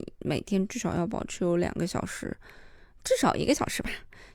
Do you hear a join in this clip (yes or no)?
no